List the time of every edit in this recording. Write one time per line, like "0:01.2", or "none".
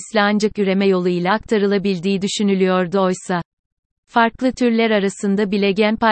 none